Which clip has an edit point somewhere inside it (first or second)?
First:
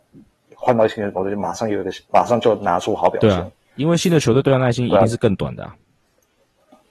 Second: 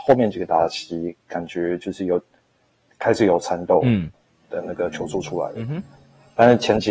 first